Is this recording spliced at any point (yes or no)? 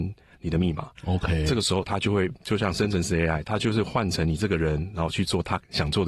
yes